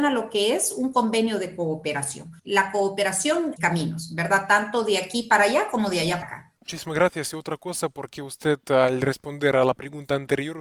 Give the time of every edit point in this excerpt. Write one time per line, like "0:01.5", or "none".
0:02.4
0:03.6
0:06.2
0:06.6